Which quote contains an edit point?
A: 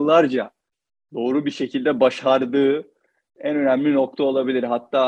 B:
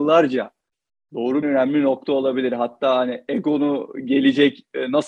B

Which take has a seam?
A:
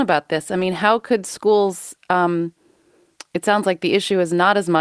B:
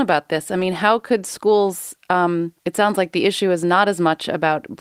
B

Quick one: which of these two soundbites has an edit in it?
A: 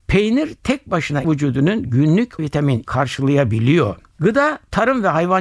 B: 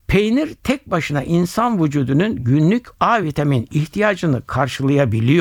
A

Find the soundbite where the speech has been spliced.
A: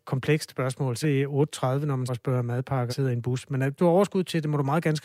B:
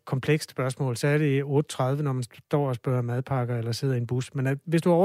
A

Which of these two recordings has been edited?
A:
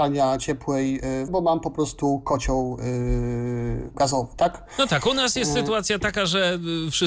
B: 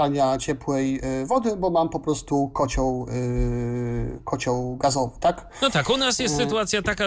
A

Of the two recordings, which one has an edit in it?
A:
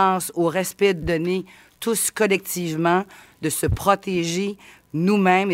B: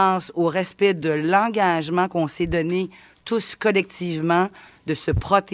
A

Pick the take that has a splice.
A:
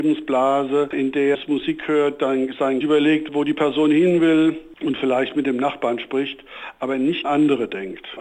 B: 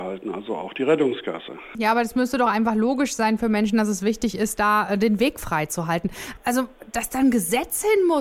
A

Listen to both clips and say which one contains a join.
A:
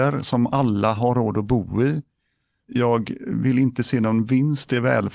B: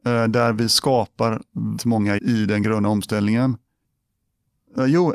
B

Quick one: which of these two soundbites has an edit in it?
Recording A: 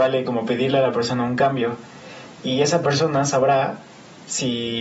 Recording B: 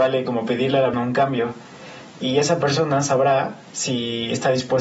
B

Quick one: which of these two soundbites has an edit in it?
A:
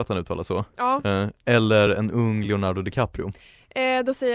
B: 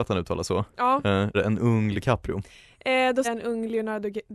B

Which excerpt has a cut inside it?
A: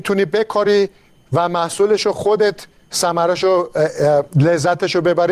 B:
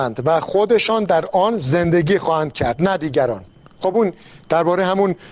B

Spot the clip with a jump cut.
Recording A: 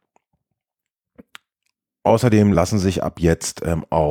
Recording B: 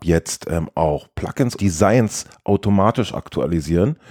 B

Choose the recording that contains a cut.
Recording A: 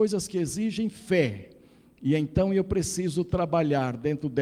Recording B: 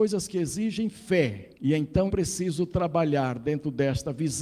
B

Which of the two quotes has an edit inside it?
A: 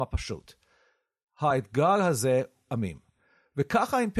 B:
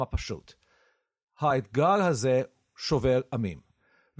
A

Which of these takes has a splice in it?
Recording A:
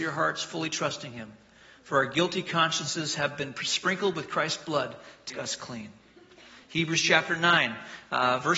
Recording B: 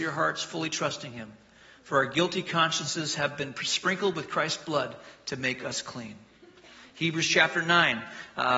A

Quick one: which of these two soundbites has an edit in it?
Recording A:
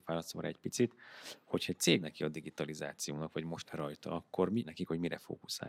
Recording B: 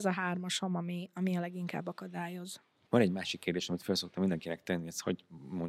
A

